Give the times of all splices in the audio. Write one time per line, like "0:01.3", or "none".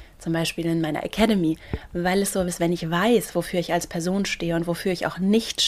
0:02.5